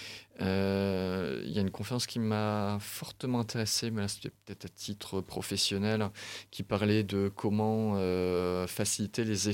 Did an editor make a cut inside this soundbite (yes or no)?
no